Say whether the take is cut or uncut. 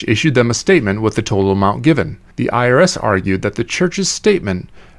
cut